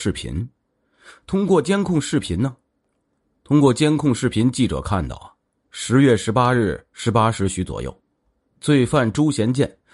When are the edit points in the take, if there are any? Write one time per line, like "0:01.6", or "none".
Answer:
none